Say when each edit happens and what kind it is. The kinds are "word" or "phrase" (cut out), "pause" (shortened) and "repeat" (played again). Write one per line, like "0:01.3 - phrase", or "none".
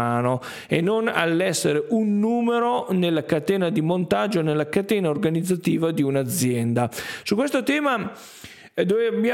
none